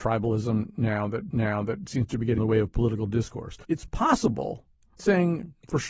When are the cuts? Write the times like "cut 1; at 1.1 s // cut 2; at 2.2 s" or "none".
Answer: cut 1; at 1.3 s // cut 2; at 2.4 s // cut 3; at 3.6 s // cut 4; at 5.0 s